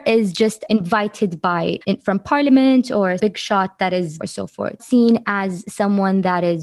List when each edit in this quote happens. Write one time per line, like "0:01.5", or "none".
0:01.8
0:03.2
0:04.2
0:04.8